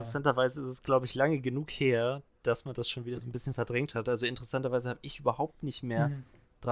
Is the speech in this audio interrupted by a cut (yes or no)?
no